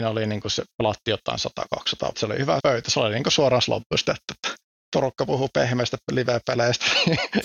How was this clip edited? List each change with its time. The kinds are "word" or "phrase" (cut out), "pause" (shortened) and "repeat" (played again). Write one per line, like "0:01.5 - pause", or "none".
0:02.1 - phrase
0:02.6 - word
0:03.6 - word
0:04.6 - pause